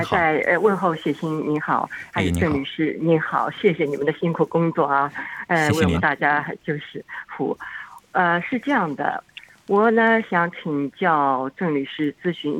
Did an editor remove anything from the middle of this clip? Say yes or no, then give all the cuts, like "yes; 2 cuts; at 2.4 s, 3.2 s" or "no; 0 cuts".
no; 0 cuts